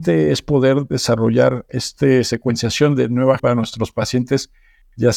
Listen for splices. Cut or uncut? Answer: cut